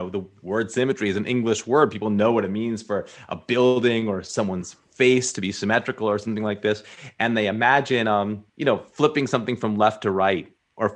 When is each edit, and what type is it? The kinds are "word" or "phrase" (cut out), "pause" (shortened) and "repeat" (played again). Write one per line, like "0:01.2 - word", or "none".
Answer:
0:04.8 - pause
0:08.5 - pause